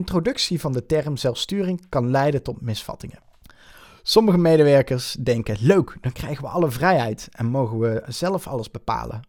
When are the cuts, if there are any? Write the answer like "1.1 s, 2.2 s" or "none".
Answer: none